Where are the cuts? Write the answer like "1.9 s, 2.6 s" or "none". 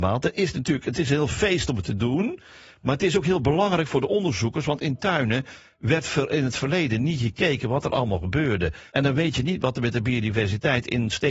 8.9 s